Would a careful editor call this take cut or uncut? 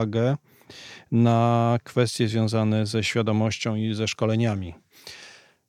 uncut